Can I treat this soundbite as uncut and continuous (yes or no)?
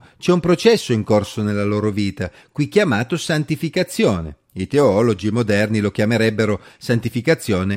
yes